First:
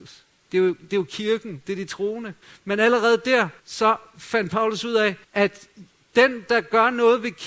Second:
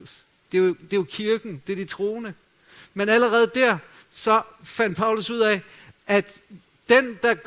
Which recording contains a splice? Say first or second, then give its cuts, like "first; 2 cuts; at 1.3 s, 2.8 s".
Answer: first; 3 cuts; at 2.4 s, 3.6 s, 5.2 s